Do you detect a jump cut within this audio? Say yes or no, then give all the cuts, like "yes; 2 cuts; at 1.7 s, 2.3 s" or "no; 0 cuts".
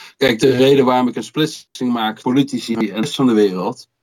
yes; 2 cuts; at 2.2 s, 3.0 s